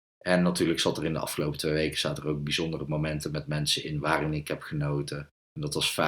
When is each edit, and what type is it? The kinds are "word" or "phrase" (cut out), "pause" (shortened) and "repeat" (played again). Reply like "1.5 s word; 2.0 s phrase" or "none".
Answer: none